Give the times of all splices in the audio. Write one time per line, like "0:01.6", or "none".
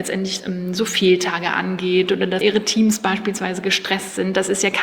0:02.4